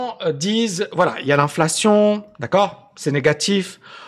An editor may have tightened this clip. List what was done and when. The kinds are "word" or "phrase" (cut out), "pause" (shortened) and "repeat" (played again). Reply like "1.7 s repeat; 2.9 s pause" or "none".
none

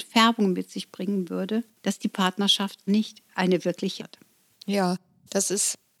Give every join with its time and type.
1.7 s pause; 2.9 s word; 4.0 s word

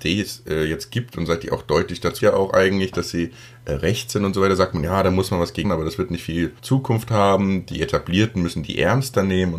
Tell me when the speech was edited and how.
2.2 s word; 5.6 s word; 6.6 s pause

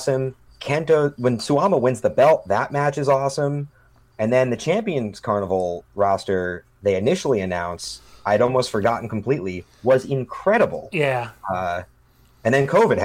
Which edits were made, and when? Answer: none

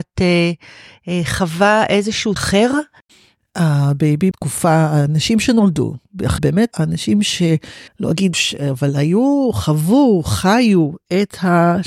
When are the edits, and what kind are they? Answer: 2.4 s phrase; 4.3 s phrase; 6.4 s phrase; 6.7 s word; 7.9 s pause; 8.3 s word

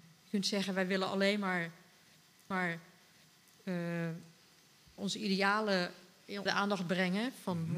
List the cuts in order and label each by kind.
2.5 s repeat; 6.5 s word

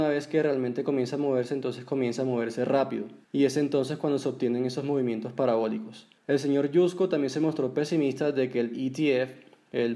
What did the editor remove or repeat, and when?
3.2 s pause; 6.2 s pause

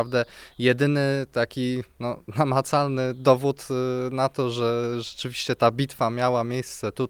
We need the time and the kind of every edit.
none

